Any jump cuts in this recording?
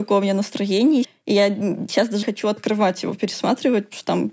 yes; 2 cuts; at 1.0 s, 2.2 s

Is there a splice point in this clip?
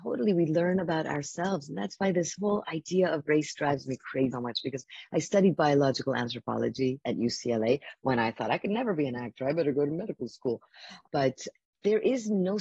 yes; 2 cuts; at 4.3 s, 7.0 s

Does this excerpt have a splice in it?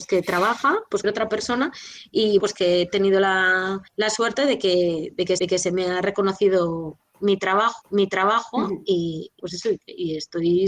yes; 6 cuts; at 1.0 s, 2.4 s, 3.9 s, 5.4 s, 7.8 s, 9.4 s

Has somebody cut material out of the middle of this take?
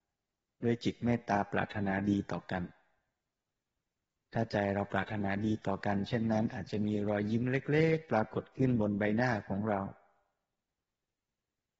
no; 0 cuts

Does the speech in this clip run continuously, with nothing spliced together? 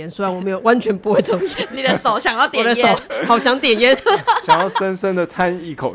yes; 0 cuts

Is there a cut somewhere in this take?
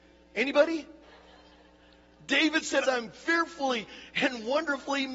yes; 2 cuts; at 1.0 s, 2.8 s

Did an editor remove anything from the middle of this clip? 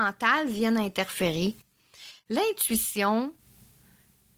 no; 0 cuts

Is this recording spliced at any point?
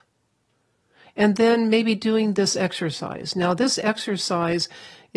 no; 0 cuts

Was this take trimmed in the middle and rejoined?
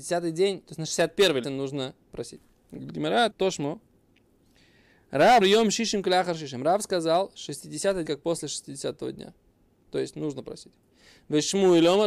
yes; 4 cuts; at 1.4 s, 3.3 s, 5.4 s, 8.1 s

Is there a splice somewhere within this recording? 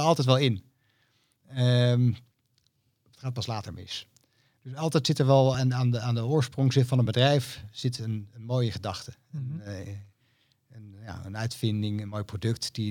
no; 0 cuts

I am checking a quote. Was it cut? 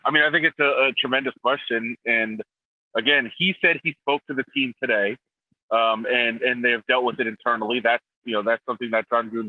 no; 0 cuts

